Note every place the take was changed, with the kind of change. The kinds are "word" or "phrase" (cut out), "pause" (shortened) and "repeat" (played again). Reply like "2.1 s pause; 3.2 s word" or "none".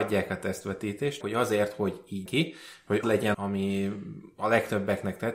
1.2 s word; 2.3 s word; 3.0 s word; 3.3 s word

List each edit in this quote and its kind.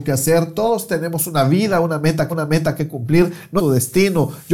2.3 s repeat; 3.6 s phrase

